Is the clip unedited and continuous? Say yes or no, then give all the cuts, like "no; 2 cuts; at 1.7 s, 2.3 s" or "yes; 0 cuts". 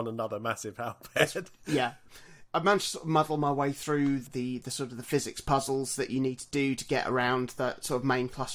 yes; 0 cuts